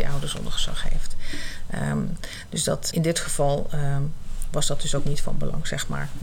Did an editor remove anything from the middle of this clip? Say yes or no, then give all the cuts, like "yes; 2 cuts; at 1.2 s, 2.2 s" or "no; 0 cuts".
yes; 1 cut; at 2.9 s